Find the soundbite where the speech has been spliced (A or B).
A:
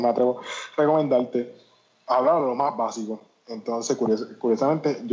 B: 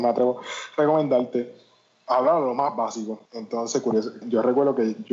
B